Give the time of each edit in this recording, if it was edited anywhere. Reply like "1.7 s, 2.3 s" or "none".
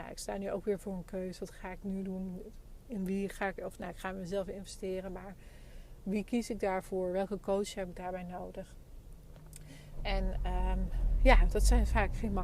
none

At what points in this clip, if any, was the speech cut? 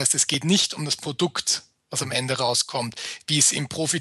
none

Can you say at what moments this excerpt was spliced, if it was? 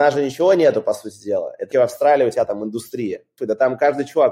1.7 s

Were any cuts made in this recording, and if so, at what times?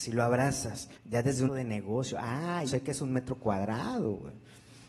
1.0 s, 1.5 s, 2.7 s

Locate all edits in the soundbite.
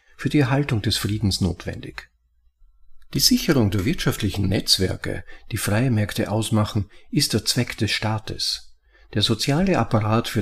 none

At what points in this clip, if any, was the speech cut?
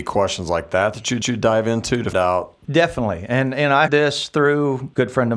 1.2 s, 2.1 s, 3.9 s

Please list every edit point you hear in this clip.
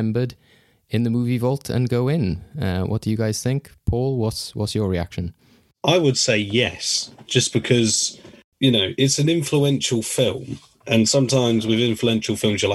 none

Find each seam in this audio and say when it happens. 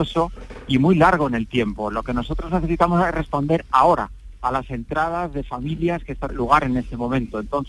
6.3 s

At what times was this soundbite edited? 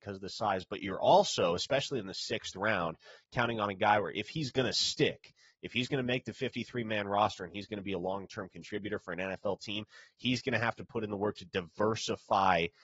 none

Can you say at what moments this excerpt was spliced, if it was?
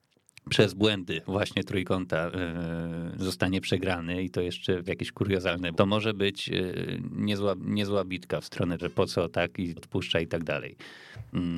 1.7 s, 4.9 s, 5.7 s, 7.6 s, 8.8 s, 9.8 s

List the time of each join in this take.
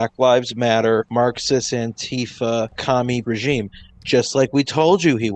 3.2 s

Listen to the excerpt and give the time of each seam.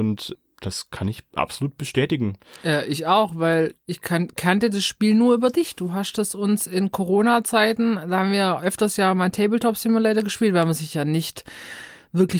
none

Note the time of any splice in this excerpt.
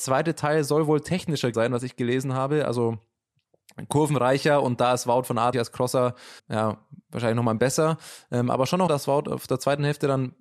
1.5 s, 5.5 s, 6.4 s, 7.6 s, 8.9 s

